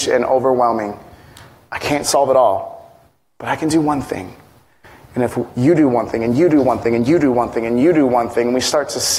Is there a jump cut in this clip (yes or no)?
no